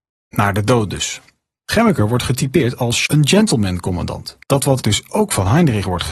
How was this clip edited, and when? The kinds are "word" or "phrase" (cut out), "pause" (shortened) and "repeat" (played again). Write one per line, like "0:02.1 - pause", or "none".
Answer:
0:03.1 - word
0:04.4 - pause
0:04.8 - word

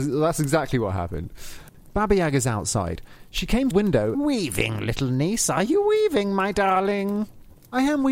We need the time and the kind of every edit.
0:03.7 - word
0:04.1 - phrase

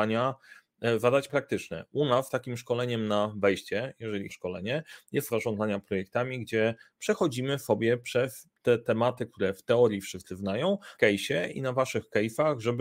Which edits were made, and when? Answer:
0:01.3 - word
0:04.3 - phrase
0:05.3 - word
0:11.0 - word

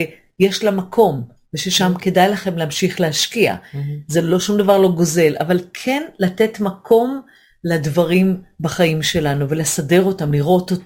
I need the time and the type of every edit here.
none

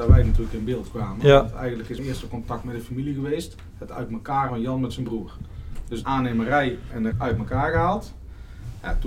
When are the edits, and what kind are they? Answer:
0:02.0 - word
0:04.5 - word
0:06.0 - word
0:07.1 - word

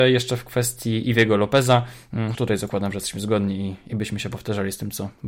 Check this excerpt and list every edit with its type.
0:02.3 - word

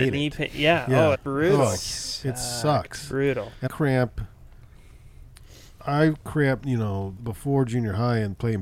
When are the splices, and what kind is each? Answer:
0:01.1 - word
0:03.7 - word
0:06.6 - word
0:07.2 - word

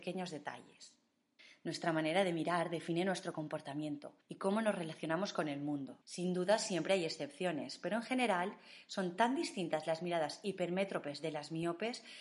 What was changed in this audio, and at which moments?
0:01.4 - pause
0:04.2 - pause
0:06.0 - pause

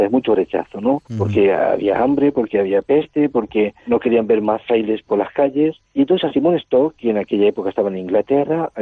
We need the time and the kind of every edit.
0:01.0 - pause
0:03.9 - word
0:05.1 - word
0:05.8 - pause

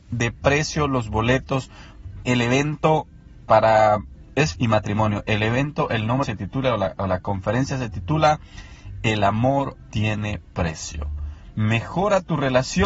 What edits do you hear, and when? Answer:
0:02.2 - word
0:03.5 - word
0:04.5 - word
0:06.2 - phrase
0:09.9 - word

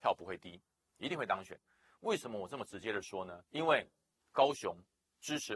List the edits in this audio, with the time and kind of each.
0:03.5 - pause

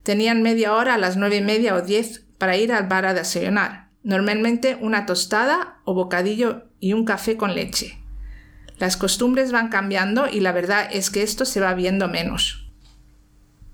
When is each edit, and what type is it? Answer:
0:04.0 - pause

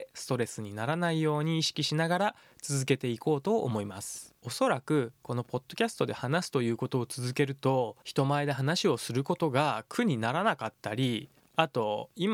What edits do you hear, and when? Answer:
0:04.4 - pause
0:08.0 - pause

